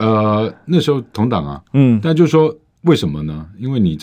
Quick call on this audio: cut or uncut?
uncut